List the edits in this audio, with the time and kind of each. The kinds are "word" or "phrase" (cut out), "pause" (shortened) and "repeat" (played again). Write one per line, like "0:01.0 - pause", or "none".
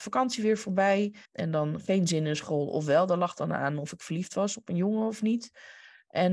0:01.3 - pause